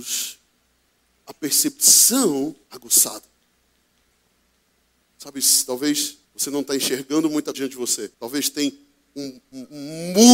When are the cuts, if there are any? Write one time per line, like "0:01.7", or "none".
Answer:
0:02.6
0:06.3
0:07.5
0:08.1